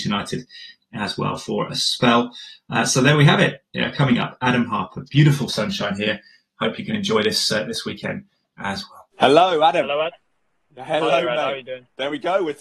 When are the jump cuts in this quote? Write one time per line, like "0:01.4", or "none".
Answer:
0:09.1